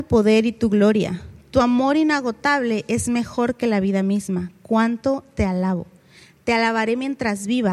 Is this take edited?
no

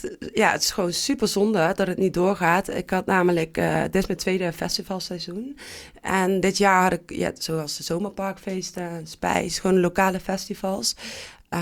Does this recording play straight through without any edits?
yes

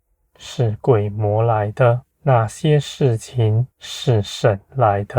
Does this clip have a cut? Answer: yes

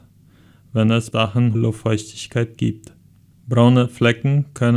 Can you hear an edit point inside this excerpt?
yes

